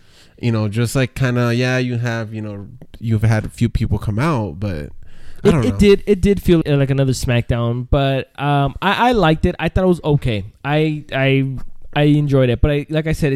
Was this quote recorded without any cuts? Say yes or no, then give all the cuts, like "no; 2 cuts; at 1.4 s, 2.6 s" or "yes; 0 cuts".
no; 1 cut; at 6.6 s